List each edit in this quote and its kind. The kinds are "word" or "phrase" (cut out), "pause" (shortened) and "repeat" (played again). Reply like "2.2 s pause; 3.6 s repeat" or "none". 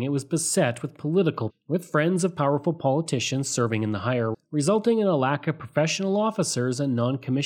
1.5 s word; 4.3 s word